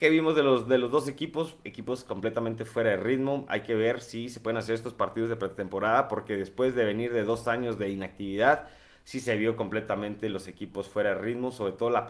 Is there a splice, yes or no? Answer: no